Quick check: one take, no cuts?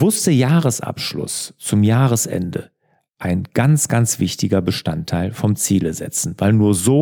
yes; 0 cuts

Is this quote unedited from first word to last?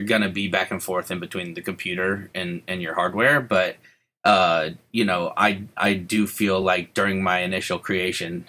yes; 0 cuts

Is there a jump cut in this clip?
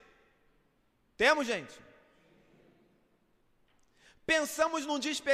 no; 0 cuts

